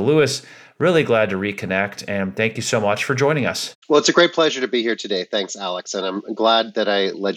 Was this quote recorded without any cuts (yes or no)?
no